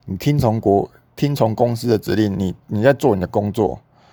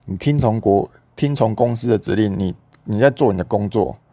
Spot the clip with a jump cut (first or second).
first